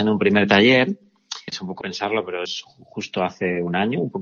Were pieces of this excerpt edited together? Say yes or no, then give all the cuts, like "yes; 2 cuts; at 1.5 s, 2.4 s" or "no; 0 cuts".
yes; 3 cuts; at 1.5 s, 1.8 s, 2.5 s